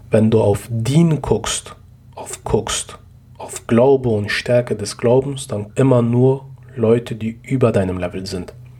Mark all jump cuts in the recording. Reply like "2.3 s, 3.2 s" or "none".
2.4 s, 5.7 s